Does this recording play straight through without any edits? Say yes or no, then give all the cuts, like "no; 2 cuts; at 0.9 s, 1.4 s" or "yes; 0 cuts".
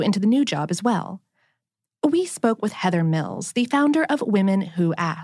yes; 0 cuts